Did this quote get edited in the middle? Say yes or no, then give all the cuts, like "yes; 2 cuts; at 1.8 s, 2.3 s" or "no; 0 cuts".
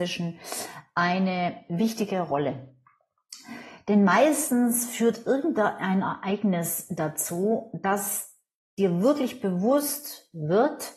no; 0 cuts